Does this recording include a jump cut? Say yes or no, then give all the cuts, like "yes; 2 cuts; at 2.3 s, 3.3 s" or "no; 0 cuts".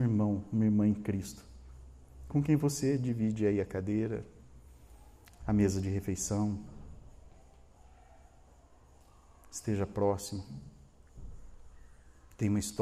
no; 0 cuts